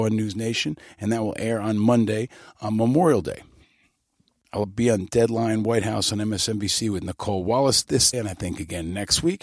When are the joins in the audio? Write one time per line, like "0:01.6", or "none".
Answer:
0:04.6
0:08.1